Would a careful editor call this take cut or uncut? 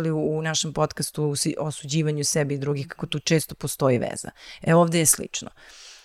uncut